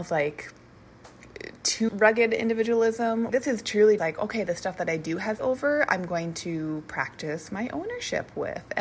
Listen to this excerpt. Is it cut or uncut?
cut